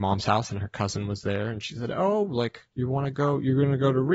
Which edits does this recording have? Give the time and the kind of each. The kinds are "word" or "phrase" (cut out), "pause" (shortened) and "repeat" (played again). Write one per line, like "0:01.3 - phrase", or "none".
0:02.7 - pause